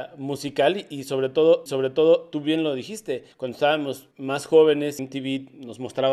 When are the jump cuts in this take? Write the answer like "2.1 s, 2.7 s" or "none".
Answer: 1.7 s, 3.3 s, 4.1 s, 5.0 s